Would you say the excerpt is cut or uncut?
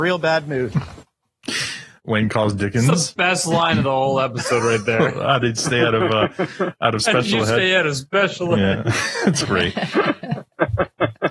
uncut